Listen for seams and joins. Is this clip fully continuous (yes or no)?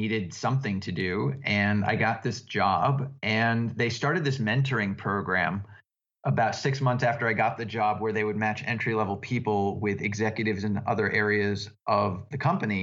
yes